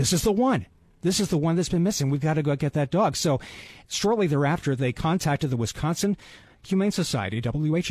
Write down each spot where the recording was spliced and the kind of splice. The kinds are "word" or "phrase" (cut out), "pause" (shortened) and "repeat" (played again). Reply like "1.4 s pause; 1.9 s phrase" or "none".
none